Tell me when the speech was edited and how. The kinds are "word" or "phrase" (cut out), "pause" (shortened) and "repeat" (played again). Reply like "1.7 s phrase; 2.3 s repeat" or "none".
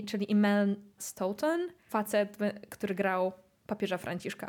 1.0 s word; 1.9 s word